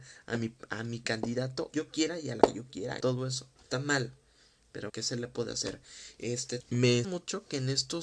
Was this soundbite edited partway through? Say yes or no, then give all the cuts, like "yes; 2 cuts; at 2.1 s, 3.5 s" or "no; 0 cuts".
yes; 7 cuts; at 1.7 s, 2.4 s, 3.0 s, 3.7 s, 4.9 s, 6.6 s, 7.0 s